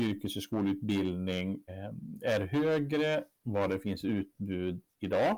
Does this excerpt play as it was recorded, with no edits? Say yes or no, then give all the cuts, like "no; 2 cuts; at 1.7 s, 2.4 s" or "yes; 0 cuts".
no; 2 cuts; at 1.7 s, 3.4 s